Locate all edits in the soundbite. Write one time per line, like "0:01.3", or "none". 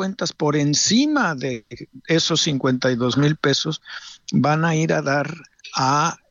none

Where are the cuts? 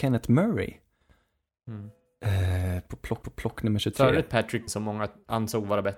0:03.2
0:04.7

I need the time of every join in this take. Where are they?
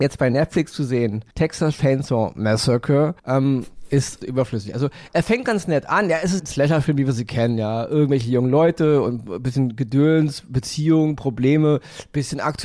0:01.3
0:03.2
0:04.2
0:06.4

